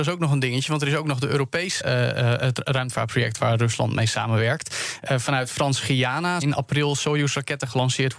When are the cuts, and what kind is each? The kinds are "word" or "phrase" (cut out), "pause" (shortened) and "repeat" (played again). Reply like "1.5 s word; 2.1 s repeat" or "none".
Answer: 1.8 s word; 6.4 s word